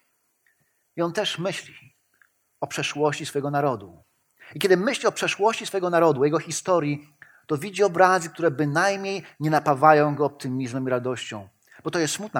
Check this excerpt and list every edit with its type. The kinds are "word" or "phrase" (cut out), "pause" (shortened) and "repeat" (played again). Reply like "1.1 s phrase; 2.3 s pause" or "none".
none